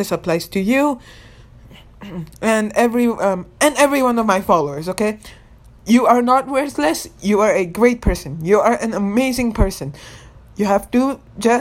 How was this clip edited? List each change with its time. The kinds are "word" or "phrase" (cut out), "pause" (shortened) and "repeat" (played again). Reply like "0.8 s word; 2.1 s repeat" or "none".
none